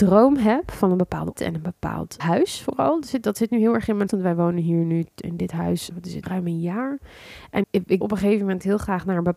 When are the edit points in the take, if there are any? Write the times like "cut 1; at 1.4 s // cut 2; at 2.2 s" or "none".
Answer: cut 1; at 1.4 s // cut 2; at 2.2 s // cut 3; at 4.1 s // cut 4; at 5.2 s // cut 5; at 5.9 s // cut 6; at 6.2 s // cut 7; at 7.6 s // cut 8; at 8.0 s